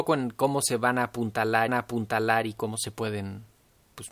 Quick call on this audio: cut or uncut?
cut